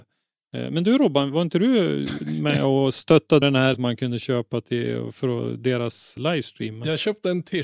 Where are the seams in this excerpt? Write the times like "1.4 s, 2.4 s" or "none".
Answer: 3.4 s, 3.7 s, 6.2 s